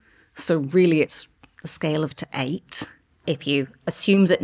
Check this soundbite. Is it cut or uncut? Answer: cut